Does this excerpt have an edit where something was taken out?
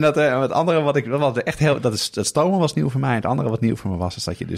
no; 0 cuts

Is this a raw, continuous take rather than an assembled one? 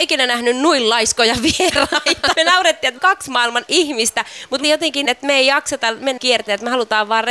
no; 6 cuts; at 2.3 s, 3.0 s, 3.7 s, 4.6 s, 5.1 s, 6.2 s

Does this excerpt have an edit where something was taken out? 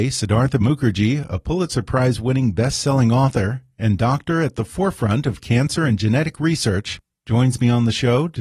no; 0 cuts

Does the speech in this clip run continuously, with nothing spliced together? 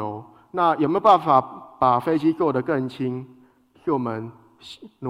yes; 0 cuts

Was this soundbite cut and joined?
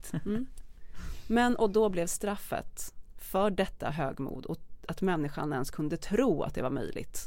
no; 0 cuts

